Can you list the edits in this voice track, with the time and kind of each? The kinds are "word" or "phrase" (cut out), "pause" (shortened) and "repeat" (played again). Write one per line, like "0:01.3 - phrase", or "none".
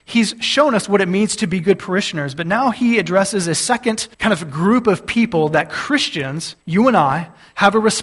0:04.1 - pause
0:06.6 - pause